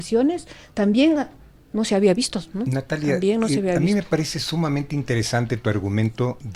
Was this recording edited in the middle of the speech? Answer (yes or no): no